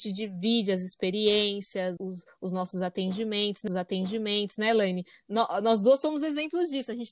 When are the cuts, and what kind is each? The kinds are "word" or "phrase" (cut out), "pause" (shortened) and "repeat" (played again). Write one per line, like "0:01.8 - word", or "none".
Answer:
0:02.0 - word
0:03.7 - repeat